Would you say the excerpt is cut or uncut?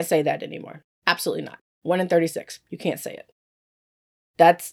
uncut